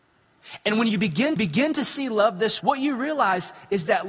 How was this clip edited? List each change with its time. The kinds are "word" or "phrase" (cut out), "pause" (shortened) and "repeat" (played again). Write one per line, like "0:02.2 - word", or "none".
0:01.4 - repeat
0:02.6 - word